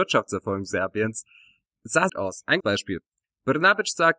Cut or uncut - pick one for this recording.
cut